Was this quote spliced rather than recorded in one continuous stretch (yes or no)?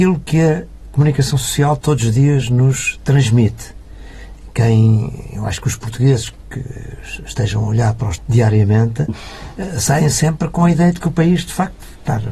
yes